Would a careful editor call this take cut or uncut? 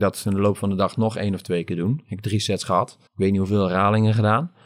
cut